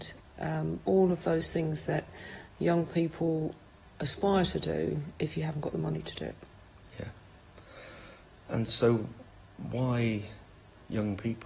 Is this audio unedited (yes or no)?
yes